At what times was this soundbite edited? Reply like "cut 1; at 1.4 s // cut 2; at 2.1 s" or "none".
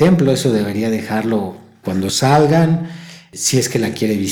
cut 1; at 1.8 s